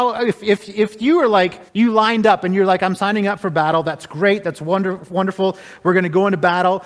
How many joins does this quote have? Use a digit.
1